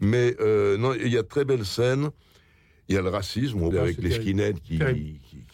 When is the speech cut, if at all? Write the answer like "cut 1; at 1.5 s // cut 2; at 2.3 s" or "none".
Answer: cut 1; at 3.7 s // cut 2; at 4.6 s